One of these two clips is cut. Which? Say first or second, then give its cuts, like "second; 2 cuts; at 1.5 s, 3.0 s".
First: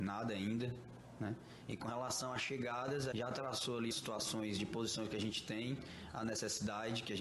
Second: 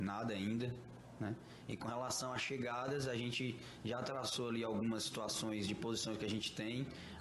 first; 2 cuts; at 3.1 s, 3.9 s